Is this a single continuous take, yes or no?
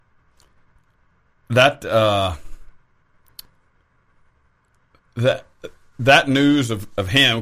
yes